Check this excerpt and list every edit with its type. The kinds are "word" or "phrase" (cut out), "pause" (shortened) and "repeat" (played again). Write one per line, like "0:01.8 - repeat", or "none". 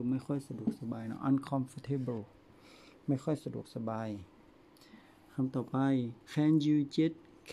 0:06.2 - pause